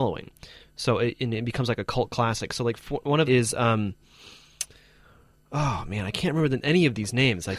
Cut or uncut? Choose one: cut